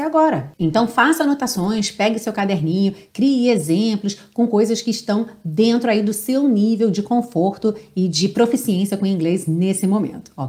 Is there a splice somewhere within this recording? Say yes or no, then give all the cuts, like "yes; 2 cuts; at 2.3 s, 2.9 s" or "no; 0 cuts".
no; 0 cuts